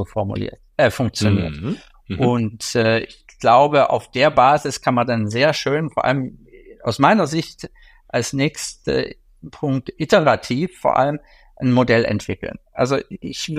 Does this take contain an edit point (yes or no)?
no